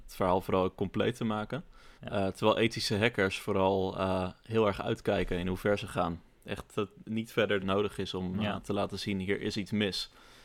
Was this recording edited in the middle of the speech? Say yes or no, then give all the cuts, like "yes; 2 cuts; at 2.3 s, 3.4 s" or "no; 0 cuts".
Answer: yes; 2 cuts; at 2.0 s, 7.6 s